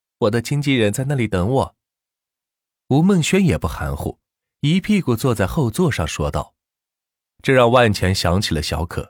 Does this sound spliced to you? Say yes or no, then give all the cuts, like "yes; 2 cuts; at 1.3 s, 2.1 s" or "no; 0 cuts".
no; 0 cuts